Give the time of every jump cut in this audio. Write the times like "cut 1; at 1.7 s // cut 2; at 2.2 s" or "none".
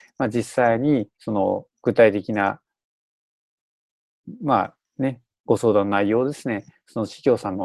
cut 1; at 1.1 s